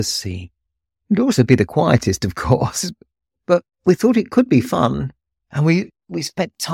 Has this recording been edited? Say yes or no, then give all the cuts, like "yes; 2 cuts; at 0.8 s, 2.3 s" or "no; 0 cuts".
no; 0 cuts